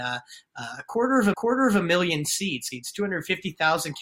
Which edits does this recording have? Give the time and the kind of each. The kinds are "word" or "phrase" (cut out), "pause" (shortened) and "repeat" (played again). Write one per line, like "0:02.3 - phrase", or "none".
0:01.3 - repeat
0:02.7 - word